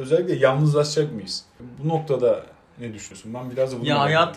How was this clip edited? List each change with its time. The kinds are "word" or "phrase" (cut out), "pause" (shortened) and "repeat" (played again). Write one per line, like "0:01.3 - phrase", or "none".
none